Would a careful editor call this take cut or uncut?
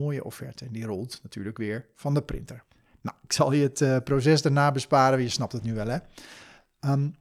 uncut